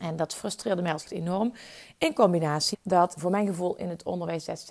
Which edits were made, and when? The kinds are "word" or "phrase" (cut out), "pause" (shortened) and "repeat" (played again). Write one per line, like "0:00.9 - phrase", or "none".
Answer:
0:01.0 - word
0:02.7 - word
0:03.2 - word